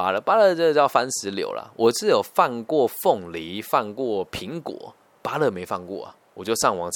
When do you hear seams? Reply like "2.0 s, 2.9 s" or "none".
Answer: 5.1 s